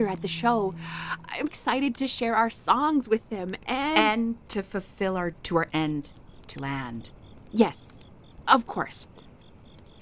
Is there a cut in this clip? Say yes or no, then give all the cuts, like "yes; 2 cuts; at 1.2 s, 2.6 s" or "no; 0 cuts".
yes; 4 cuts; at 1.5 s, 5.3 s, 5.7 s, 6.6 s